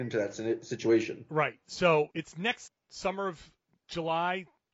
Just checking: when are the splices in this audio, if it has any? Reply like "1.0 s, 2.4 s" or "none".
2.1 s, 2.7 s